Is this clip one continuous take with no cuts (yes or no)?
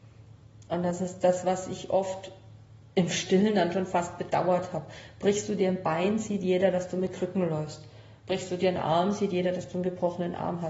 yes